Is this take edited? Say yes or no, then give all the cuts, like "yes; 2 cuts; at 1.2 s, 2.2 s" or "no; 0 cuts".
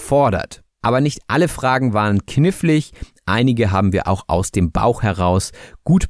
no; 0 cuts